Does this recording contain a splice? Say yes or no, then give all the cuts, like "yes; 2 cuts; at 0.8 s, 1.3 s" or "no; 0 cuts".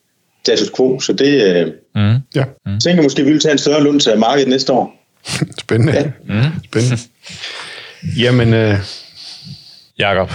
yes; 2 cuts; at 2.3 s, 2.6 s